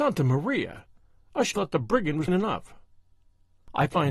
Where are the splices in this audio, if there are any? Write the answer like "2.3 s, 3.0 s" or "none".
1.5 s, 2.3 s

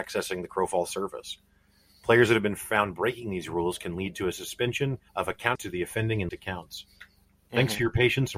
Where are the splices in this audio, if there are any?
5.1 s, 5.5 s, 6.3 s

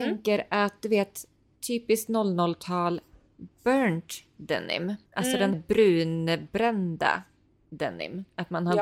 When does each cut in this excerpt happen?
5.1 s, 5.5 s

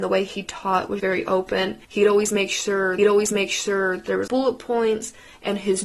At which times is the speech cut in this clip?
1.0 s, 1.8 s, 3.0 s, 4.3 s

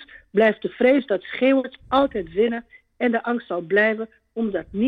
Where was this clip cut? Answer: none

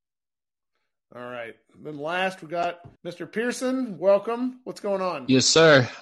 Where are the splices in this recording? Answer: 3.0 s

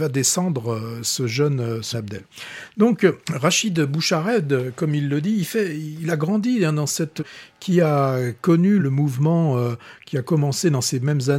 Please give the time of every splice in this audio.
1.9 s, 3.2 s, 7.2 s, 8.8 s

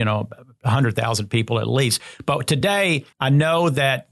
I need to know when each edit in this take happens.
3.1 s

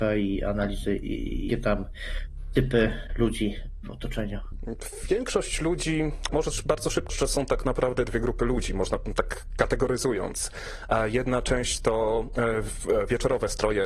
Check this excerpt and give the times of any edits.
1.5 s, 3.8 s, 6.3 s, 7.1 s, 8.1 s

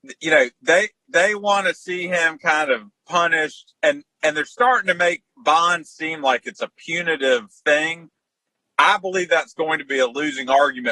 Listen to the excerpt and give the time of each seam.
none

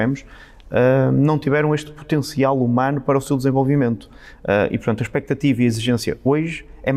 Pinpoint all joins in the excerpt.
none

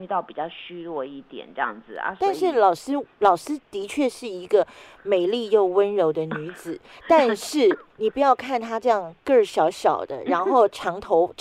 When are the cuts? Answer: 7.9 s

